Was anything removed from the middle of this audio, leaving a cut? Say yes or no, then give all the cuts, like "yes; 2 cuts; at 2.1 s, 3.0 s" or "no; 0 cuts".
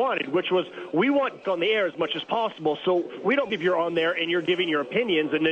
yes; 2 cuts; at 1.4 s, 3.5 s